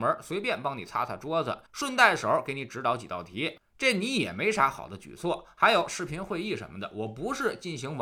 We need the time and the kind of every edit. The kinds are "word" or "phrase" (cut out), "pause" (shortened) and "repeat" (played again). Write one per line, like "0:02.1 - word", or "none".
0:01.7 - pause